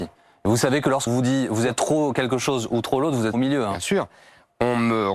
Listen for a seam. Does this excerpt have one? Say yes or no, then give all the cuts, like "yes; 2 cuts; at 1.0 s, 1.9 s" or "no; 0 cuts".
yes; 2 cuts; at 1.1 s, 3.3 s